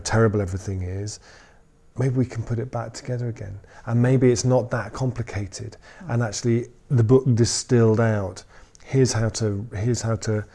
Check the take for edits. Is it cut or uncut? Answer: uncut